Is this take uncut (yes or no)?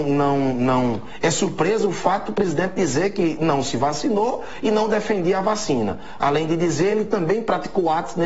yes